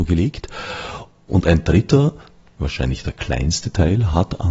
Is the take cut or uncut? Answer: uncut